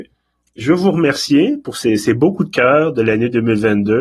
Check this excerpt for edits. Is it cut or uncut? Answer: uncut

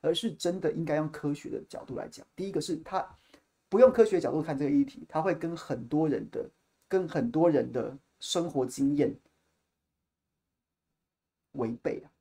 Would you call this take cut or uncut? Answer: uncut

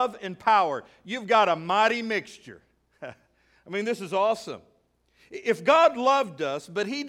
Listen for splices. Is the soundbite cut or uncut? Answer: uncut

